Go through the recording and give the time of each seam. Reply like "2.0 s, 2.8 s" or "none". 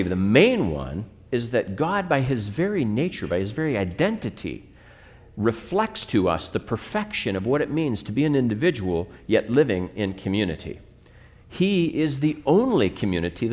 none